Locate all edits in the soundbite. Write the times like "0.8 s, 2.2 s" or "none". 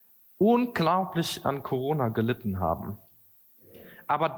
none